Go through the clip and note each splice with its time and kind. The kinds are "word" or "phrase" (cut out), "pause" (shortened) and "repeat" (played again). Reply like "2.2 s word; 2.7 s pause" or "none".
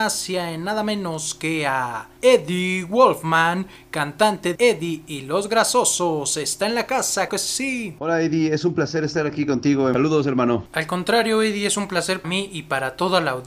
4.6 s word; 7.3 s word; 12.2 s word